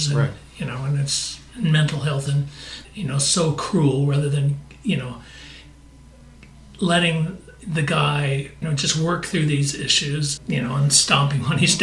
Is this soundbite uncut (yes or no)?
no